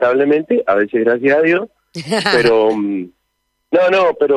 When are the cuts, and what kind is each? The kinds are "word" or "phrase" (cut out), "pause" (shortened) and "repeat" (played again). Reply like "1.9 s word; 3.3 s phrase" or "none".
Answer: none